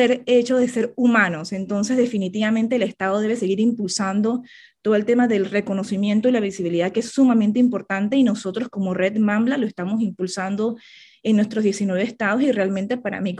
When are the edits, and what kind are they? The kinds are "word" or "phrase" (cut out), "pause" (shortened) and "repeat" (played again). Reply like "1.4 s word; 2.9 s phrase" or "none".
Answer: none